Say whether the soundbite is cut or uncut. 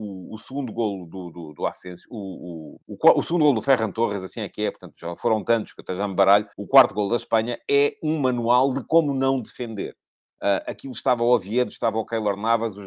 cut